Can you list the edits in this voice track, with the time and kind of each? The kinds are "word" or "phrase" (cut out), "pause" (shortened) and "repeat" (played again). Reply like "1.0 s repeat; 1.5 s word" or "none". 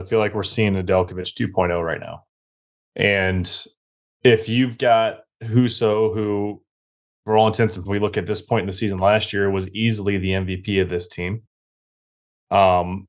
7.8 s word